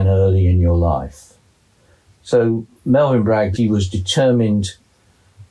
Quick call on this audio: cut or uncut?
cut